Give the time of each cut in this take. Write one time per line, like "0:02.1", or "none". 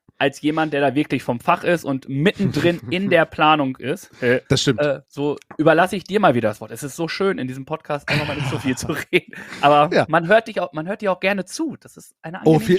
0:04.5
0:05.1